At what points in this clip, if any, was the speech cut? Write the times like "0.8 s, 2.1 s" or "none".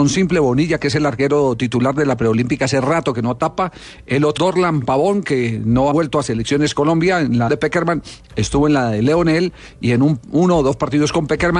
4.4 s, 5.9 s, 7.5 s